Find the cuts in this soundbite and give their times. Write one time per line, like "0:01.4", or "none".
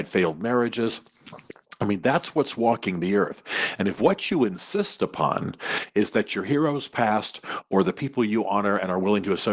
none

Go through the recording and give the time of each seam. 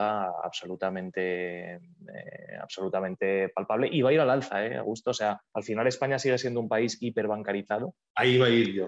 0:05.5

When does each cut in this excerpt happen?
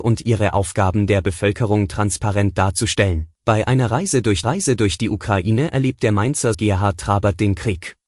0:03.3
0:04.4
0:06.5

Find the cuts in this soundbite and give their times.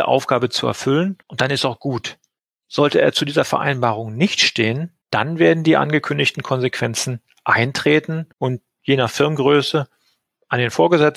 0:01.2
0:02.4
0:05.0
0:08.3

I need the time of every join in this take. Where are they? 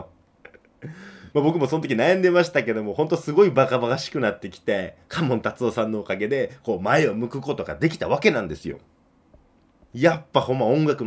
none

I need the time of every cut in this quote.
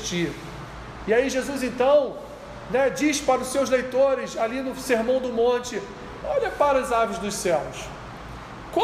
none

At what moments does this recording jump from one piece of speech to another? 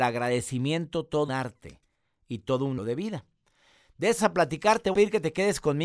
0:01.3
0:02.8
0:04.2
0:04.9

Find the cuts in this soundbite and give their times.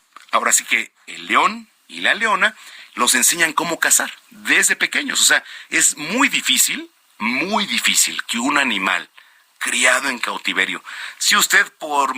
0:01.8

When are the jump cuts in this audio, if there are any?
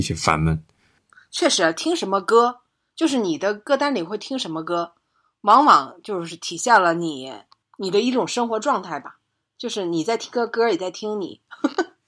none

